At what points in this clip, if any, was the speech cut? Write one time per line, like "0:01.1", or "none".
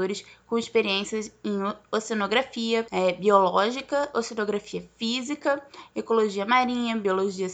none